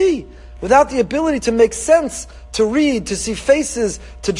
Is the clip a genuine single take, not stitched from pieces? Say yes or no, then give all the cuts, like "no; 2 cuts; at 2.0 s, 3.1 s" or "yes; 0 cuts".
yes; 0 cuts